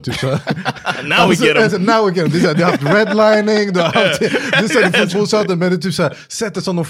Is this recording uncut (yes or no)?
no